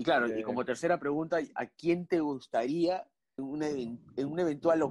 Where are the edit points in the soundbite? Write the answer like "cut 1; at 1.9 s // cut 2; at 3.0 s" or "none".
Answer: cut 1; at 3.4 s